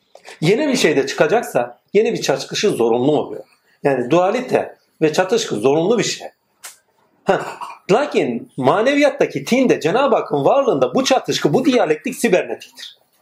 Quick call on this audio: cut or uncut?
uncut